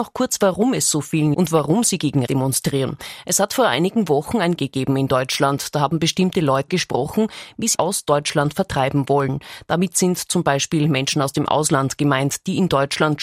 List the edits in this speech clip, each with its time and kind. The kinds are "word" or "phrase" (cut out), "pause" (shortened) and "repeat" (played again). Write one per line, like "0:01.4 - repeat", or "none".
0:01.3 - phrase
0:02.3 - word
0:04.6 - word
0:06.7 - word
0:07.7 - phrase

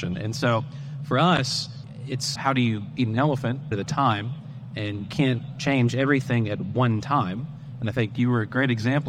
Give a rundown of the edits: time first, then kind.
0:02.4 - word
0:03.7 - phrase
0:05.1 - word

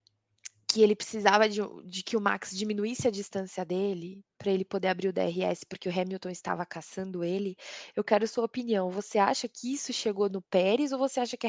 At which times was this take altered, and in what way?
none

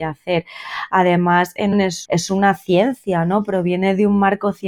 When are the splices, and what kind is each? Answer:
0:01.7 - phrase
0:02.1 - word

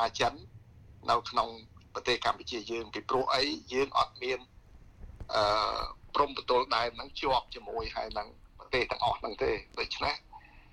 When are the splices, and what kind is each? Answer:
0:01.0 - pause
0:01.8 - pause
0:08.5 - pause

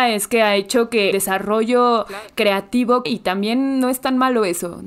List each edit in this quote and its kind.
0:01.1 - word
0:03.0 - word

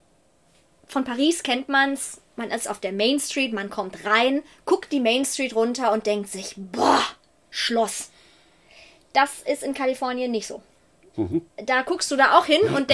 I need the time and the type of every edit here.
none

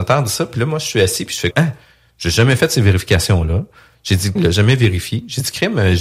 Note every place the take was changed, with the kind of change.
0:01.5 - word
0:04.4 - word

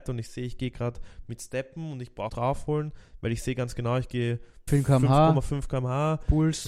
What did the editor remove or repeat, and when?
0:02.3 - phrase
0:04.7 - phrase

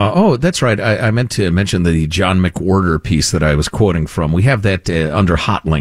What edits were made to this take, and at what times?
none

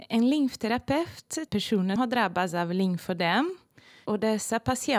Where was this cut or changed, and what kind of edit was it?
0:01.5 - phrase
0:02.0 - word

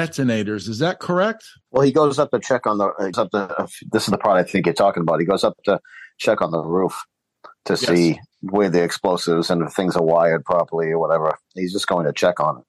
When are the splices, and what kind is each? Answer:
0:03.1 - word
0:08.3 - word

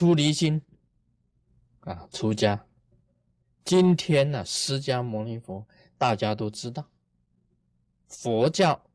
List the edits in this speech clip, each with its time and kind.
none

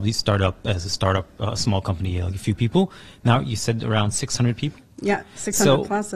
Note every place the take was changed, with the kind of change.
none

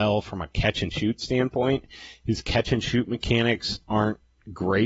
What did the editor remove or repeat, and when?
none

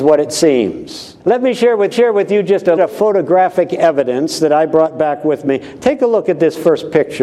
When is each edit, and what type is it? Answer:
0:01.2 - pause
0:01.9 - repeat
0:02.8 - phrase

